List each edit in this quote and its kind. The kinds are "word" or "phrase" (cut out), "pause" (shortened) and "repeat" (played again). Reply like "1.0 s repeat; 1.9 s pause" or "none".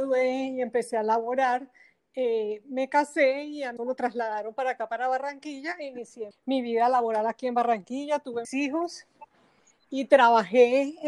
3.8 s word; 6.3 s word; 8.4 s word